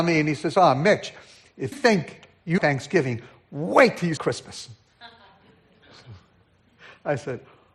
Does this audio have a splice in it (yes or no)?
yes